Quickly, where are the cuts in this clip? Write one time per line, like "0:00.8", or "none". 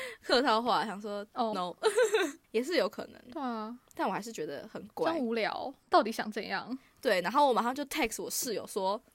0:01.5